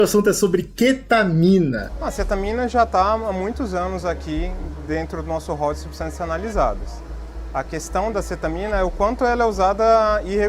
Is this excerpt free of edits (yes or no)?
yes